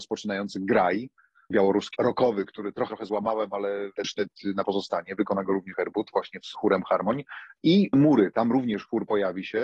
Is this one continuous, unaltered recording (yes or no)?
no